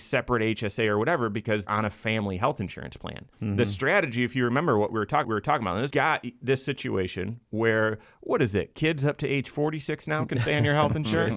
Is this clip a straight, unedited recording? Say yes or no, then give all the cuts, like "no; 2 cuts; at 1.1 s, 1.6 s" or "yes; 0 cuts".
no; 4 cuts; at 1.7 s, 3.3 s, 5.2 s, 5.9 s